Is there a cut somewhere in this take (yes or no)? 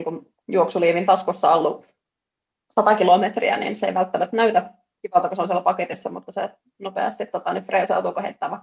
yes